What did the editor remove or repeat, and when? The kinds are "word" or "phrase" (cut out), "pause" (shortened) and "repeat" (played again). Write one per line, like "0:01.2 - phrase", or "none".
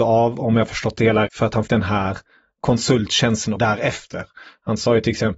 0:01.3 - word
0:01.7 - word
0:03.6 - word